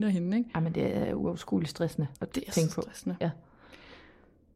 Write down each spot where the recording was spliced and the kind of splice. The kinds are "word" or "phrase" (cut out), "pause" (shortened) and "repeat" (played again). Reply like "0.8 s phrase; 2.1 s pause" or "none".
2.2 s pause